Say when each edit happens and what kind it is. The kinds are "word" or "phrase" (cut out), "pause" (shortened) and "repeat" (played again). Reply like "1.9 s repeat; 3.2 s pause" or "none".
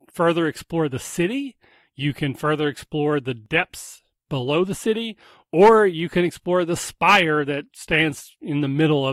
none